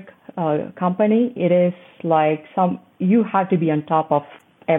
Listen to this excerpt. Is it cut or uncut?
uncut